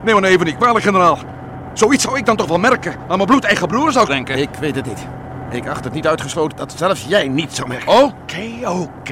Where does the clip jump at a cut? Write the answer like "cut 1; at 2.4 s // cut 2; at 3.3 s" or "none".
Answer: cut 1; at 4.1 s // cut 2; at 6.5 s